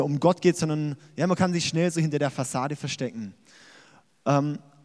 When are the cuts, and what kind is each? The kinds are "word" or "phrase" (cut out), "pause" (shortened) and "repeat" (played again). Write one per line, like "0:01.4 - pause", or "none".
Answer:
none